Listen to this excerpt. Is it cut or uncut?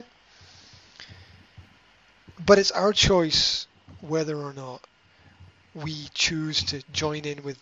uncut